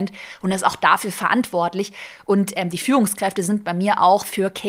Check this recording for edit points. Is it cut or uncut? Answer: uncut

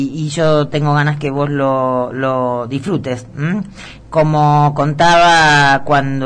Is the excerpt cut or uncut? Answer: uncut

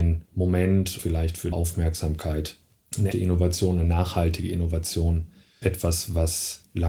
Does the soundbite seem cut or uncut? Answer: cut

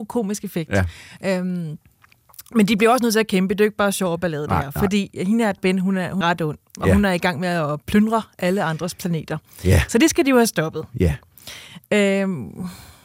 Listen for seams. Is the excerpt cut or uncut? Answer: cut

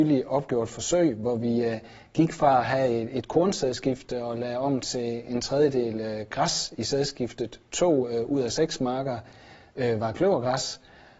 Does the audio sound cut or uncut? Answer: uncut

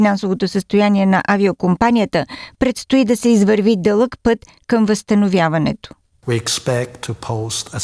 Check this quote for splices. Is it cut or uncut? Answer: uncut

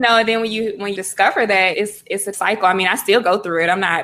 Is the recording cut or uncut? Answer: cut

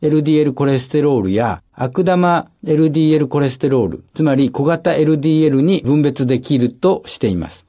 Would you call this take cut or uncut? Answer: cut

